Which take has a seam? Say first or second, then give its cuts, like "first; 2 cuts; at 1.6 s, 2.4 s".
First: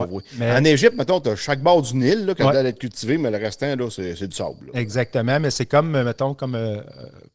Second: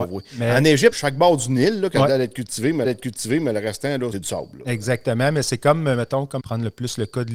second; 4 cuts; at 0.9 s, 2.8 s, 4.1 s, 6.4 s